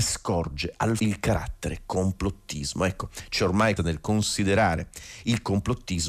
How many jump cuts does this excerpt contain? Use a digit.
2